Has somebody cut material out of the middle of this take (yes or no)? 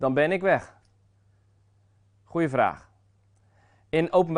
no